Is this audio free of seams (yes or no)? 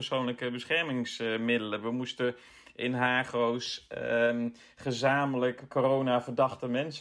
yes